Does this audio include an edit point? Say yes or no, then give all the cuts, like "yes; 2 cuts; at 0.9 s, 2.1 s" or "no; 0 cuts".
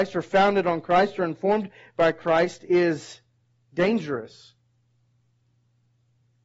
no; 0 cuts